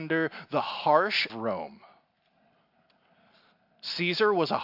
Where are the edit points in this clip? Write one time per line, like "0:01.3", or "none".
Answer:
0:01.3